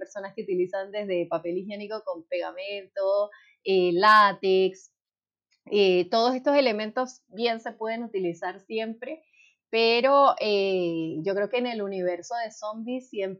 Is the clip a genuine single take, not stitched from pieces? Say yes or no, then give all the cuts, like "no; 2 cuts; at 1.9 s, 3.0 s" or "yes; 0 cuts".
yes; 0 cuts